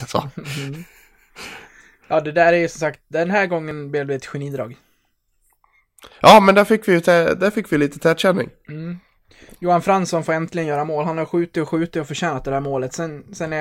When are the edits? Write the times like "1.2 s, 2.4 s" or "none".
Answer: none